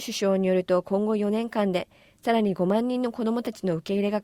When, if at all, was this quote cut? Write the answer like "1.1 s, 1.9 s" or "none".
none